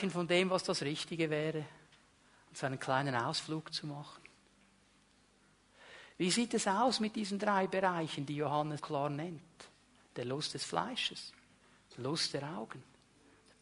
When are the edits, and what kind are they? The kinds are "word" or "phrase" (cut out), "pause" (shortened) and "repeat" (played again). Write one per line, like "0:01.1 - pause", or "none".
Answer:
0:08.8 - word